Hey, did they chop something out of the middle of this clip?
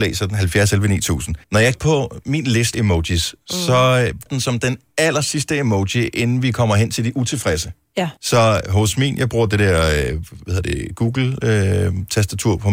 yes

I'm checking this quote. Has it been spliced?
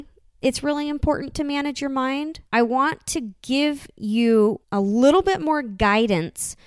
yes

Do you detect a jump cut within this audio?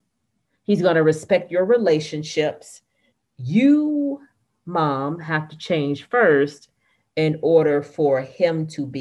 no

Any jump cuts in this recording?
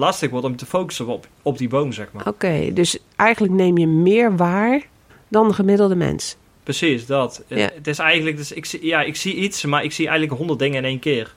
yes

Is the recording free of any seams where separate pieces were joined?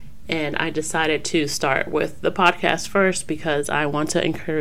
yes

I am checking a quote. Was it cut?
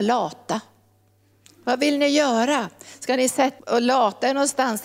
yes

